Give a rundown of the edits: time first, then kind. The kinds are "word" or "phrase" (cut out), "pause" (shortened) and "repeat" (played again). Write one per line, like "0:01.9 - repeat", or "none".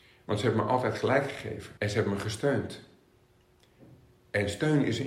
0:01.8 - pause